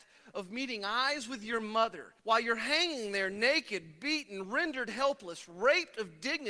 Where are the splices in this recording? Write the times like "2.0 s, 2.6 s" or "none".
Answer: 2.2 s